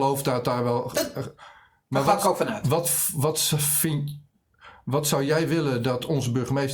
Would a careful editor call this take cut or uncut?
uncut